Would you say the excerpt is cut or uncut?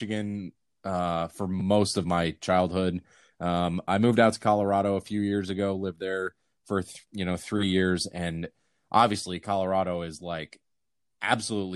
uncut